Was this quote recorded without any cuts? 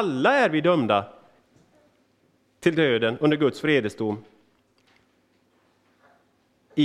yes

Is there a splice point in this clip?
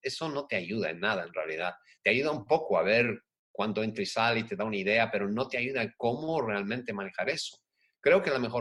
no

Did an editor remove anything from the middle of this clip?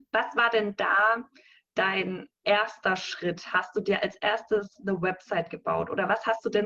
no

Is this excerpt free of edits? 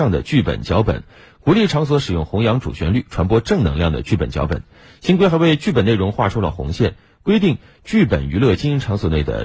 yes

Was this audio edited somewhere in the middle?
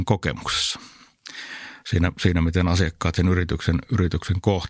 no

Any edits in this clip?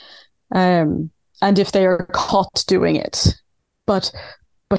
no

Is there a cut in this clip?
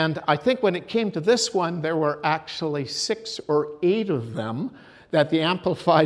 no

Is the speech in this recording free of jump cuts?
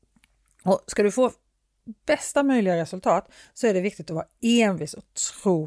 yes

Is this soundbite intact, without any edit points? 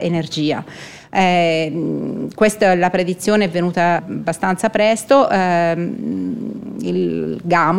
no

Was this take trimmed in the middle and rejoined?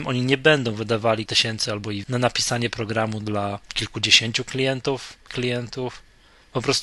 yes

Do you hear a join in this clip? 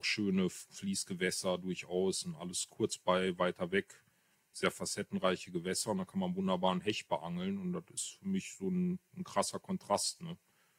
no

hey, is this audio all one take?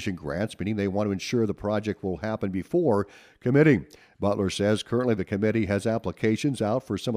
yes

